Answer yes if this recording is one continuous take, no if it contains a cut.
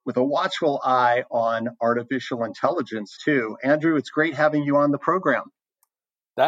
no